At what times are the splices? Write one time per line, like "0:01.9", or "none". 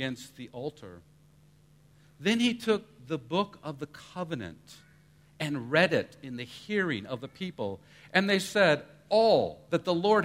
none

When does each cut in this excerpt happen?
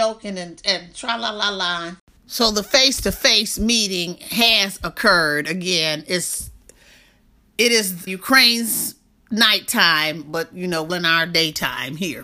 0:08.1
0:10.9

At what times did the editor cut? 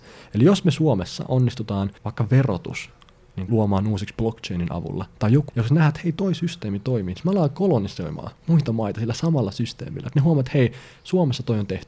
0:02.0
0:03.5
0:05.5
0:08.4

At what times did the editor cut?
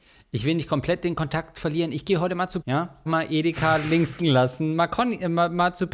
0:02.6
0:03.1
0:04.2

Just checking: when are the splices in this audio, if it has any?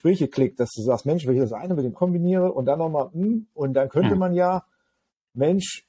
0:02.0

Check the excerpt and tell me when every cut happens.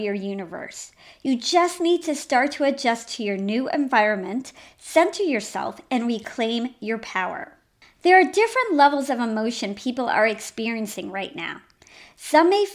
none

